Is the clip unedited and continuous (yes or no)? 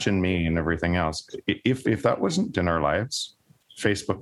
no